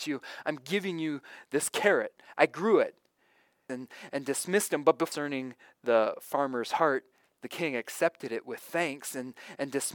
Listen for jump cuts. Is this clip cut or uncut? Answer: uncut